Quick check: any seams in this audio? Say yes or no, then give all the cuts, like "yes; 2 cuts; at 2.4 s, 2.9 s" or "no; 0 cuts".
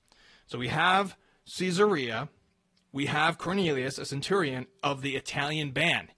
no; 0 cuts